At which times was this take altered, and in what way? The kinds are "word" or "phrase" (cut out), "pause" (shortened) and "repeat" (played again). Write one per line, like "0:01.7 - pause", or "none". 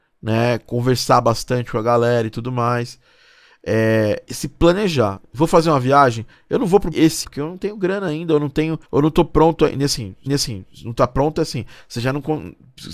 0:04.3 - word
0:06.9 - word
0:07.2 - word
0:08.8 - pause
0:10.3 - repeat